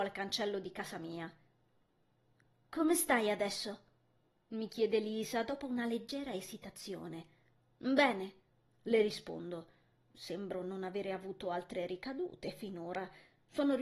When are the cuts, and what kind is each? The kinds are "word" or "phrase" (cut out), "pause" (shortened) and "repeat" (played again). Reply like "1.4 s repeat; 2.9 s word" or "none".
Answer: none